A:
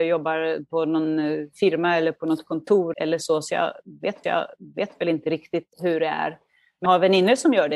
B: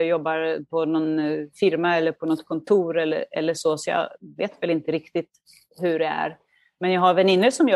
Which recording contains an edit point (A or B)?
A